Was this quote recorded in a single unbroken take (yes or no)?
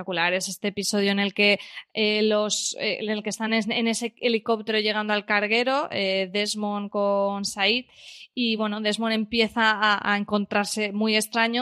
yes